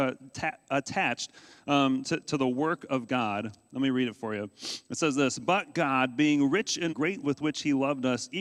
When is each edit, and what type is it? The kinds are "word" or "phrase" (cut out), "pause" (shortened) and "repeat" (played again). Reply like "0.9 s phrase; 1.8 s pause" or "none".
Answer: 2.2 s word; 4.8 s pause; 6.9 s phrase; 7.2 s word